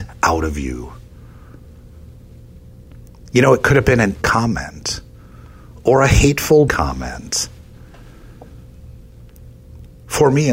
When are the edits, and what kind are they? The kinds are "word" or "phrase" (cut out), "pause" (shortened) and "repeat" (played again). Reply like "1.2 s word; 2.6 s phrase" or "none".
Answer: 4.2 s word; 6.7 s word